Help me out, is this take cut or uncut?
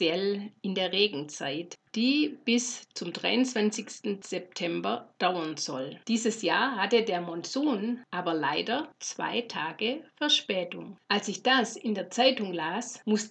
cut